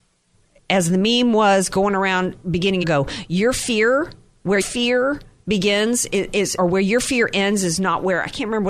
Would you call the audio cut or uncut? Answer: cut